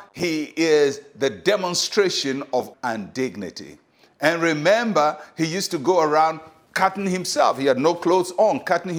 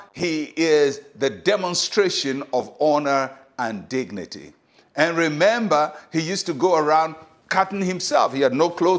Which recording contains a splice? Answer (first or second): first